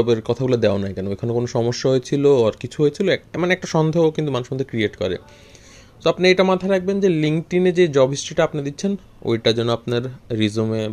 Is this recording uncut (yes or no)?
yes